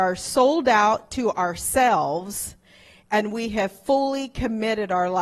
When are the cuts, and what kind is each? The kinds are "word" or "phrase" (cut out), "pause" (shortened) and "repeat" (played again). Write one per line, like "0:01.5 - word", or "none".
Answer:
none